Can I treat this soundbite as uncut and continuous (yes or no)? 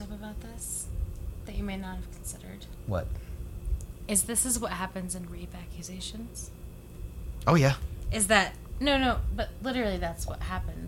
yes